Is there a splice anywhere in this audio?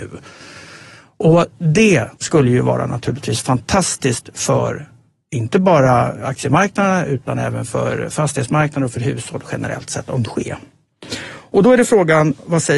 yes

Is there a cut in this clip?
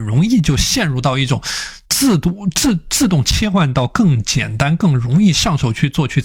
yes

